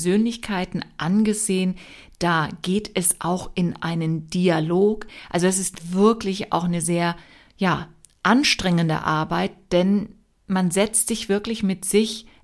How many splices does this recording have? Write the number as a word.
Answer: zero